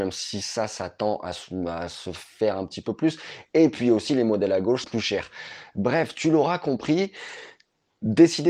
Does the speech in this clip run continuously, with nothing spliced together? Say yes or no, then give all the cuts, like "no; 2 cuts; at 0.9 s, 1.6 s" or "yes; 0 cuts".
no; 1 cut; at 4.8 s